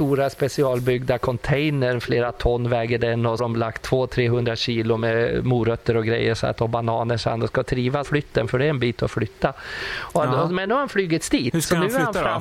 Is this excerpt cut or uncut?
cut